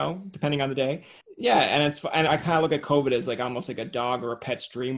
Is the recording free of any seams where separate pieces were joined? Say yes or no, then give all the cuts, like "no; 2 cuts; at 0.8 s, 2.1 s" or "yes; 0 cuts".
no; 1 cut; at 2.3 s